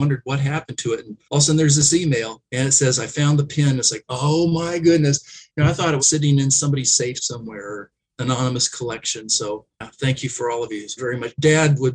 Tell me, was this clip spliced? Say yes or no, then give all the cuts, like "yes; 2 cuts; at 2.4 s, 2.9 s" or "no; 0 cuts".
yes; 6 cuts; at 1.2 s, 2.5 s, 6.0 s, 8.1 s, 9.7 s, 11.0 s